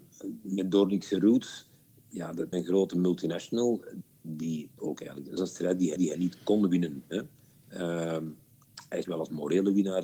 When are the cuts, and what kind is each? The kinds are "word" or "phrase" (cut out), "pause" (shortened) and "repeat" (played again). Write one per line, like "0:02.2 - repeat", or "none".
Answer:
0:02.5 - word
0:04.8 - word
0:05.4 - phrase
0:06.0 - repeat
0:09.0 - word